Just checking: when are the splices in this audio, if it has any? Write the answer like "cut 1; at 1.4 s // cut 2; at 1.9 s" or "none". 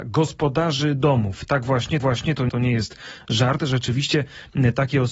cut 1; at 2.0 s // cut 2; at 2.5 s